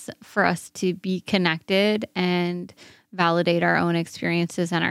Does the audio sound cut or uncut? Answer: uncut